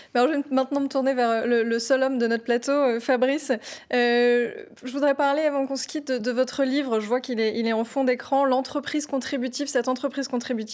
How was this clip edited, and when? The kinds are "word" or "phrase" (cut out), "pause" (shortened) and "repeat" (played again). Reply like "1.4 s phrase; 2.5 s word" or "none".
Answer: 6.2 s word